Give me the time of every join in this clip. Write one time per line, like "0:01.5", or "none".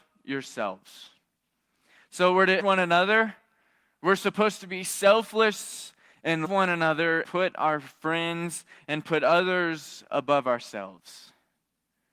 0:02.6
0:06.4
0:07.2